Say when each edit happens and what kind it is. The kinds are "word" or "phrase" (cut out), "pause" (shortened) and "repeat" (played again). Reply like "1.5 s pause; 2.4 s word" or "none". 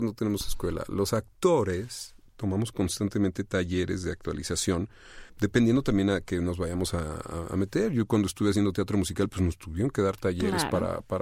5.3 s pause